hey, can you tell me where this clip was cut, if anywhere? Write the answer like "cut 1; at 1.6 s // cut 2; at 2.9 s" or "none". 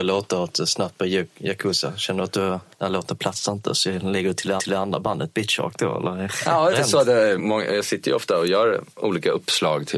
cut 1; at 2.7 s // cut 2; at 4.6 s // cut 3; at 6.7 s // cut 4; at 7.4 s